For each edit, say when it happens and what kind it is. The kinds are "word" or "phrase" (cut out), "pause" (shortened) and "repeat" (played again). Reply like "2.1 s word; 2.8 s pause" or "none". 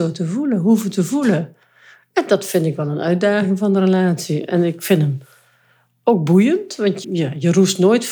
7.0 s word